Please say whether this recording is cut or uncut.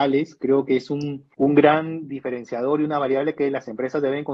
cut